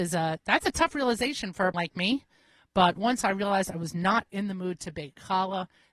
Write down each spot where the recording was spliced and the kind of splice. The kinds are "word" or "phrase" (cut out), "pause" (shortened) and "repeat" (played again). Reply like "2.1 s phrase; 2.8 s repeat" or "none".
1.7 s word; 4.3 s word